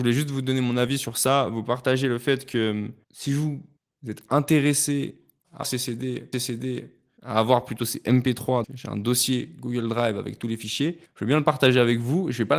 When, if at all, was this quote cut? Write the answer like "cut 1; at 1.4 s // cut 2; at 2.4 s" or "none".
cut 1; at 3.8 s // cut 2; at 5.6 s // cut 3; at 6.3 s // cut 4; at 8.6 s